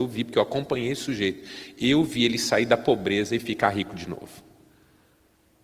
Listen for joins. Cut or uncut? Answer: uncut